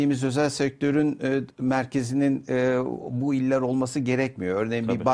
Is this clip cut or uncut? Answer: uncut